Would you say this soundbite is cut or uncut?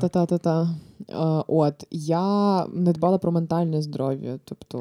uncut